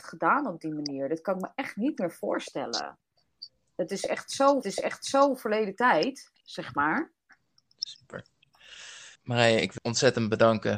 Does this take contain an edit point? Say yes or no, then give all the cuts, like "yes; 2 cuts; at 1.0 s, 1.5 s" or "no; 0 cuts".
yes; 3 cuts; at 4.6 s, 9.2 s, 9.8 s